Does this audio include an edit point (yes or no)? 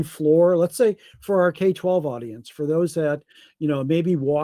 no